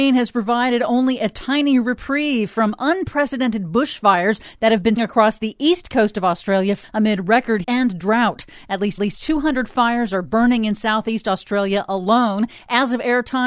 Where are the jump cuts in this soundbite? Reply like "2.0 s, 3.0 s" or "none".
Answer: 5.0 s, 6.8 s, 7.6 s, 9.0 s